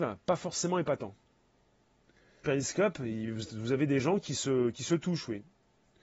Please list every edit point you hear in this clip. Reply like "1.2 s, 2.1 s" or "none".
2.4 s

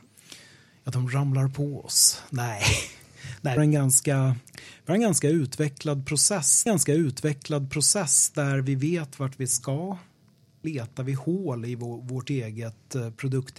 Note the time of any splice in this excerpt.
3.6 s, 4.5 s, 6.7 s, 10.6 s

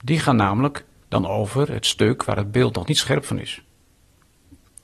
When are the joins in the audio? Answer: none

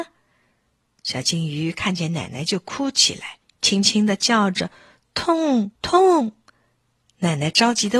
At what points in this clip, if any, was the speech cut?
3.4 s, 5.8 s

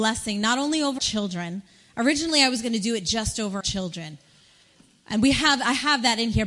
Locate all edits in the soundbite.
1.0 s, 3.6 s

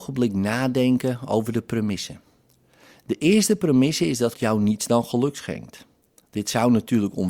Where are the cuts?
4.3 s

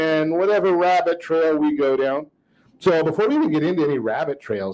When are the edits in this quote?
none

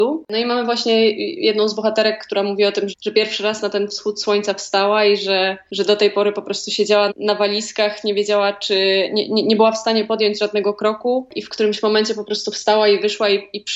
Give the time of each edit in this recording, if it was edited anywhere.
2.9 s, 7.1 s

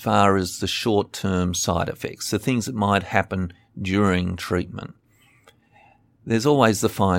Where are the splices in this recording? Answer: none

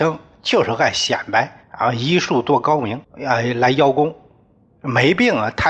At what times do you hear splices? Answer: 1.6 s, 3.0 s

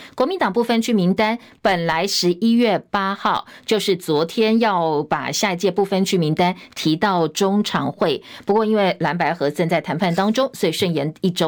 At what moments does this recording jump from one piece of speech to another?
none

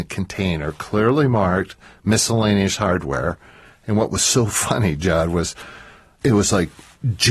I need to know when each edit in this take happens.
none

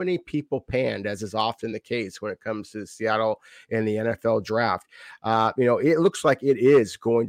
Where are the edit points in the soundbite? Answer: none

